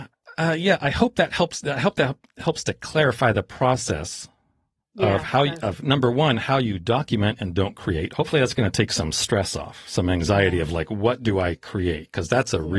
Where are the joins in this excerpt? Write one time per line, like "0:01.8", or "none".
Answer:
none